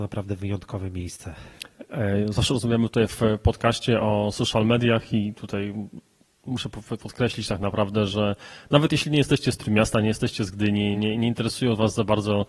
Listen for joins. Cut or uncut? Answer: uncut